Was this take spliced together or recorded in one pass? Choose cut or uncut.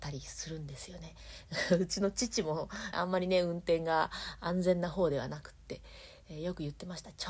cut